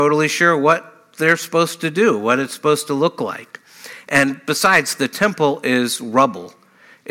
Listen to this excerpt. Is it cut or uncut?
uncut